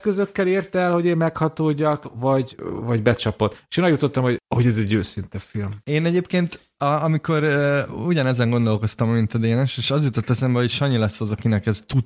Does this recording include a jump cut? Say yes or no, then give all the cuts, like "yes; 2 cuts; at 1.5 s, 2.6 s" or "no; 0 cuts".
no; 0 cuts